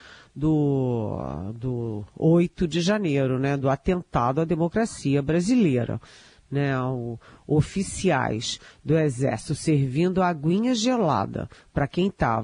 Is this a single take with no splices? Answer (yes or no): yes